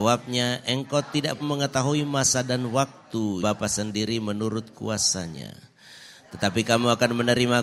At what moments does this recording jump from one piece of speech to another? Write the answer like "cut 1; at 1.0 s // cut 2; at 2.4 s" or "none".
cut 1; at 1.4 s // cut 2; at 3.4 s